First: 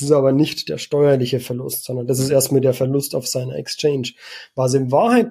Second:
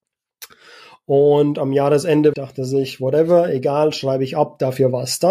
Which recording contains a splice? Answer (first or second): second